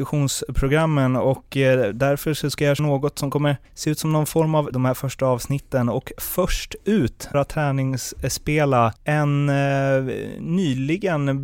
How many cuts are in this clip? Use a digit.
5